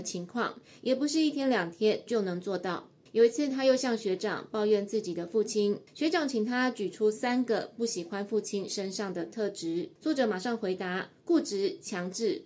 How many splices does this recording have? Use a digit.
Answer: 3